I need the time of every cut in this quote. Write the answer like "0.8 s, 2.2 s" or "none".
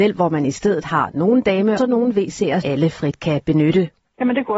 1.8 s, 2.6 s